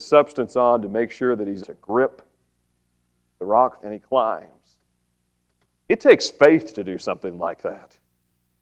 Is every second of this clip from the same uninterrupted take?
no; 2 cuts; at 1.6 s, 3.8 s

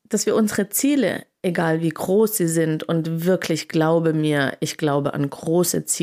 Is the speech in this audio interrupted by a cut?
no; 0 cuts

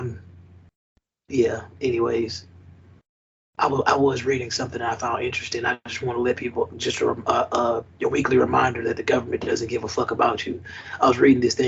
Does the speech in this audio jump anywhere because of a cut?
no; 0 cuts

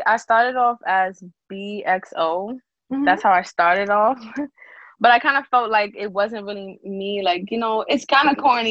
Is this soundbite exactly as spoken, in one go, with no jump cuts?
yes; 0 cuts

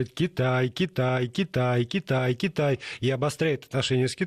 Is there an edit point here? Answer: no; 0 cuts

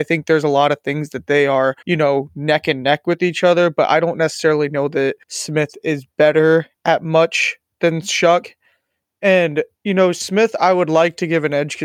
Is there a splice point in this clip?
yes; 4 cuts; at 1.8 s, 5.2 s, 6.1 s, 9.7 s

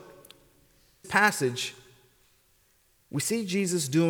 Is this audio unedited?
no; 1 cut; at 1.0 s

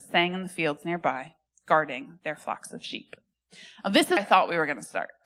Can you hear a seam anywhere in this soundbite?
yes; 1 cut; at 4.2 s

